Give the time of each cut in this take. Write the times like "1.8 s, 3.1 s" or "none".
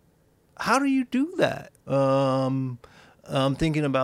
1.8 s